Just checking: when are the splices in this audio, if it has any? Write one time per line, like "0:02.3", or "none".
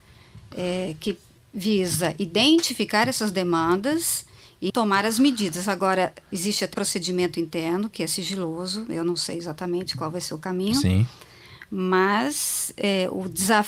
0:04.7
0:06.7